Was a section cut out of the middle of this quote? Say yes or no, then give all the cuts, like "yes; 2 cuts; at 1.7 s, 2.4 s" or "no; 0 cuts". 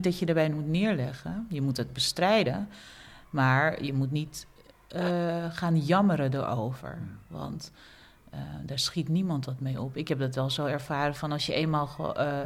no; 0 cuts